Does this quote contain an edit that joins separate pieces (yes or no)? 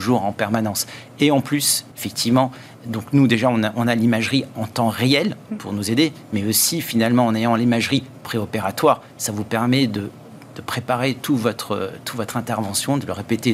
yes